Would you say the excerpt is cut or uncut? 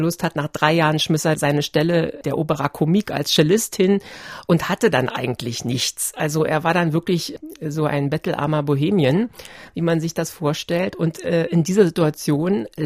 cut